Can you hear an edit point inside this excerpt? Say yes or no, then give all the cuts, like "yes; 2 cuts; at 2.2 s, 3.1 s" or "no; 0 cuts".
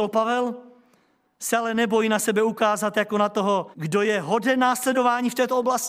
yes; 1 cut; at 3.7 s